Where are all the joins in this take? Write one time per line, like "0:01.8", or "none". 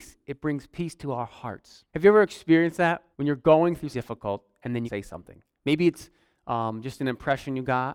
0:01.9
0:03.1
0:03.9
0:04.8